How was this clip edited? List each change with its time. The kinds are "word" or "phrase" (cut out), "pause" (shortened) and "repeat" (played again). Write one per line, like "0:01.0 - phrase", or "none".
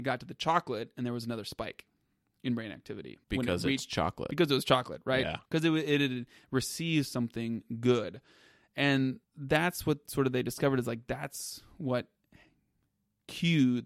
0:03.2 - pause
0:09.2 - pause